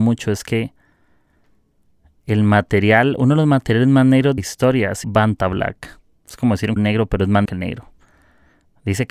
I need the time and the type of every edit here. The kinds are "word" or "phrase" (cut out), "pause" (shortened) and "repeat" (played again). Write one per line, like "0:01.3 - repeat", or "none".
0:04.4 - word
0:05.0 - word
0:06.8 - word
0:07.5 - word